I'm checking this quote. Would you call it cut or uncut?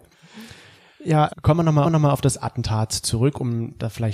cut